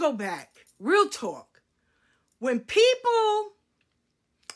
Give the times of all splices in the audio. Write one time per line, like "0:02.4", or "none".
none